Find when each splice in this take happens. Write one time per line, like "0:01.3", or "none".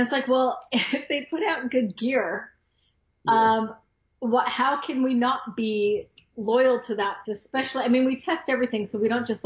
0:07.2